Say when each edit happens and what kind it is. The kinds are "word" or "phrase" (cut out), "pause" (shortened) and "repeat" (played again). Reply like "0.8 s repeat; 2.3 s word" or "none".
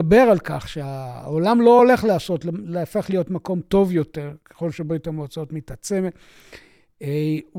none

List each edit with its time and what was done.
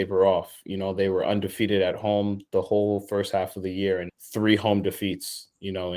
2.5 s pause; 4.1 s word

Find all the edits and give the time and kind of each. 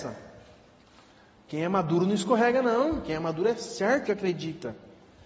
4.0 s word

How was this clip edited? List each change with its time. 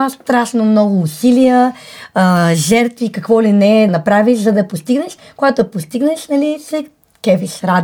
3.0 s word; 3.9 s word

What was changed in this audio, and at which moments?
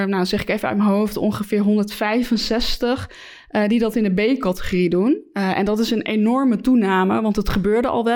none

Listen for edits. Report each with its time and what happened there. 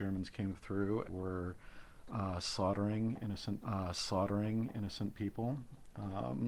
1.1 s word; 3.6 s repeat

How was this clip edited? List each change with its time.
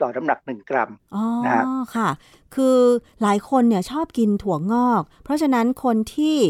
none

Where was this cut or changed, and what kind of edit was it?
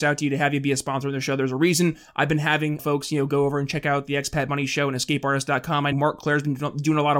2.8 s word; 5.9 s word

